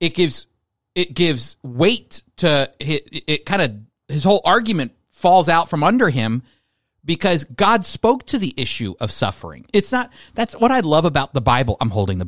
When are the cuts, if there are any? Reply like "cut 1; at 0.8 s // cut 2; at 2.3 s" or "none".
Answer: none